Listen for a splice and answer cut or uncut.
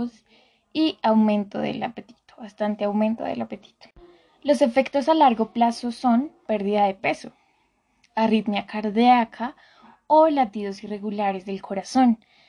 cut